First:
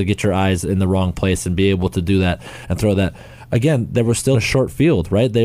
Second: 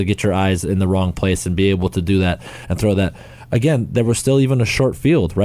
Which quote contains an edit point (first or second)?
first